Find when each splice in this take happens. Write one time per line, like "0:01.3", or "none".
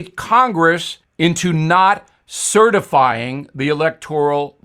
0:01.0

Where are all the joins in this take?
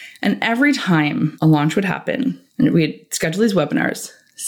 none

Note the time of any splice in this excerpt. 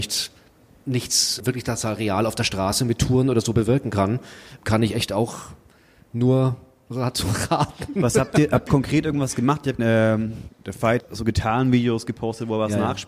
0:01.4
0:04.6
0:08.7
0:09.8
0:10.5
0:11.0

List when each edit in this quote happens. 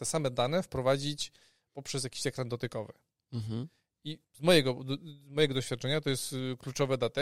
0:04.2

